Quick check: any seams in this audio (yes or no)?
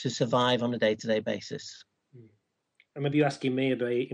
no